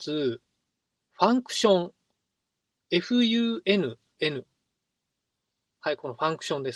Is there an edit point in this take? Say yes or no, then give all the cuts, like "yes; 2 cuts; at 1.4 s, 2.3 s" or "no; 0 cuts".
yes; 1 cut; at 4.2 s